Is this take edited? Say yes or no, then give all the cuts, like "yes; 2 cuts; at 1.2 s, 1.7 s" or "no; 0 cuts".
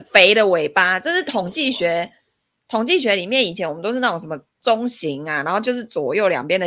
no; 0 cuts